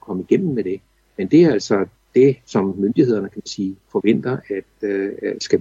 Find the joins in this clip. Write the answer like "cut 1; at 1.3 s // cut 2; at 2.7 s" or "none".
none